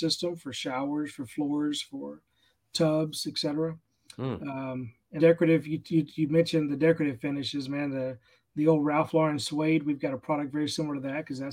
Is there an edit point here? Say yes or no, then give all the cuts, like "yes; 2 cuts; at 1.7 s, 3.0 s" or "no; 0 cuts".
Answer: yes; 1 cut; at 5.2 s